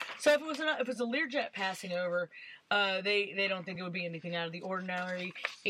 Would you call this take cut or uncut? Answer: uncut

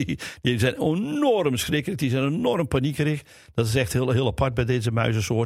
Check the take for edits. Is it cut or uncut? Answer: uncut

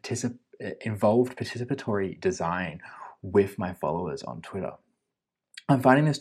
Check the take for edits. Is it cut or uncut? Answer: uncut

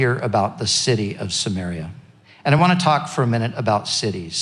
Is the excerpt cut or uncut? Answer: uncut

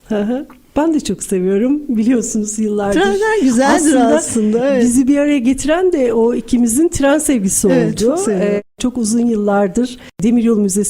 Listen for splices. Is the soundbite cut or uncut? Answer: uncut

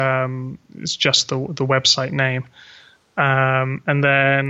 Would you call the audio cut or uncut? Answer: uncut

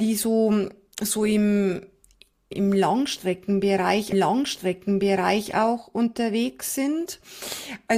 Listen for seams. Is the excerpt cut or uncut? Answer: cut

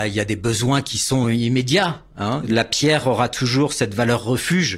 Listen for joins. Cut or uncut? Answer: uncut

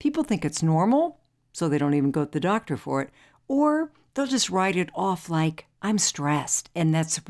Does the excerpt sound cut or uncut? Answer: uncut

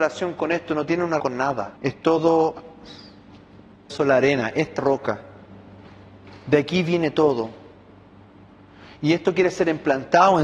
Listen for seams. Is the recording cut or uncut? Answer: cut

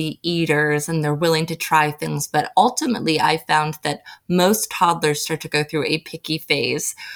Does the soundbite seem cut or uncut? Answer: uncut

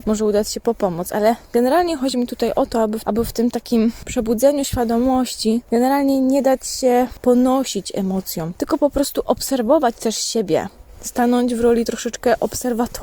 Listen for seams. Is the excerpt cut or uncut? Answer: uncut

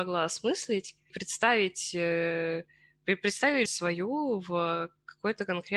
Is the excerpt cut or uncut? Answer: cut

